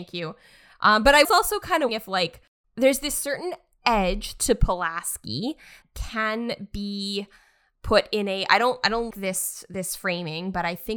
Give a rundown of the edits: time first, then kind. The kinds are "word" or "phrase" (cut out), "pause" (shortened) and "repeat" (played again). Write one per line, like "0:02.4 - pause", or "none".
0:01.2 - word
0:01.9 - word
0:05.8 - word
0:09.1 - word